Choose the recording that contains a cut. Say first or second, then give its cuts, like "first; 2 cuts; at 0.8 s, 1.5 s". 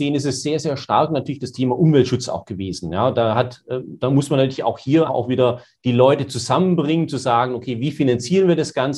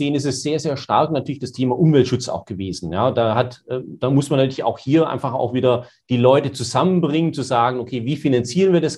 first; 1 cut; at 5.1 s